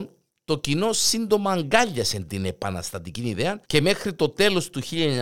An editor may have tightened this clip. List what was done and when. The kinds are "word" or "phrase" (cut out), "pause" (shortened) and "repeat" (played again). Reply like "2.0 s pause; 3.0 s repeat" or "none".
3.6 s pause

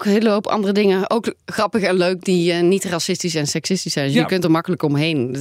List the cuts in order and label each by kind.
none

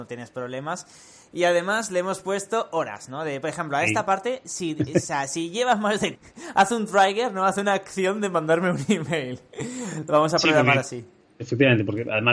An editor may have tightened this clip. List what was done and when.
6.2 s phrase

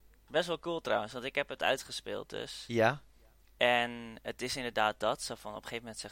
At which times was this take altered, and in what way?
none

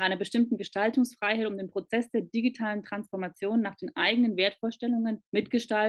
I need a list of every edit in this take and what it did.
none

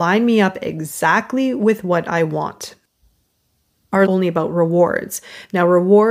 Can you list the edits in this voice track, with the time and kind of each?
4.1 s phrase

